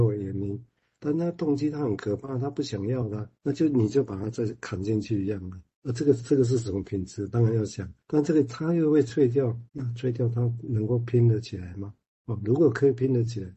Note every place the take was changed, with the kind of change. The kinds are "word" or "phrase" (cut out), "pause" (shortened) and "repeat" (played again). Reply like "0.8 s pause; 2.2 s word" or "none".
3.4 s pause; 8.0 s pause; 9.7 s pause; 12.1 s pause